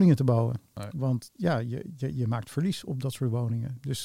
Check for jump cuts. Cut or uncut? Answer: uncut